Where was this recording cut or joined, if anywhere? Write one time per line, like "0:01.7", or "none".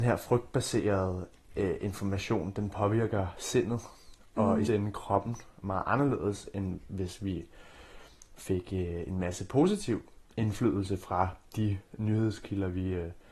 0:04.7

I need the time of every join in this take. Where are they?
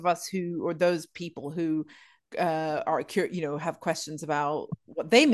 none

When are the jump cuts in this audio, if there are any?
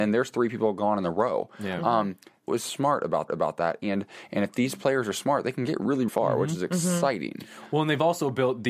0:02.5
0:03.3
0:06.1

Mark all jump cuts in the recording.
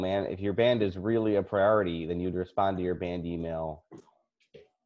none

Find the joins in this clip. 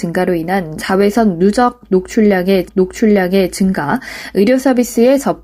0:02.7

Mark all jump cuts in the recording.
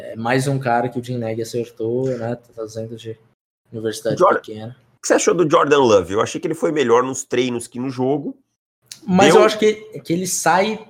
none

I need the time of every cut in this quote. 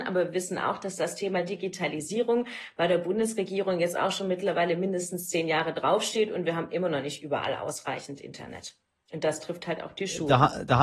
none

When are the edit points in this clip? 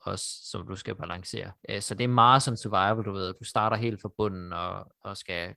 0:01.6

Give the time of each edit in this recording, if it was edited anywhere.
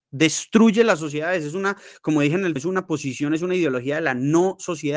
0:02.6

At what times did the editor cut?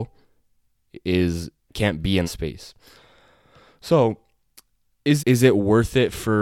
0:01.7
0:02.2
0:05.2

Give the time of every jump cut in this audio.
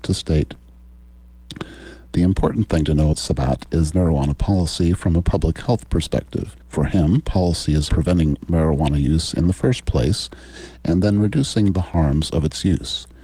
0:03.1
0:03.9
0:06.6
0:07.9

